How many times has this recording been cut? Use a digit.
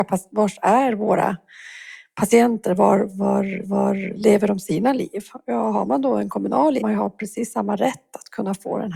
2